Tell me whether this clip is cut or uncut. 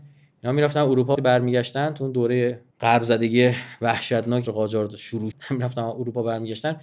cut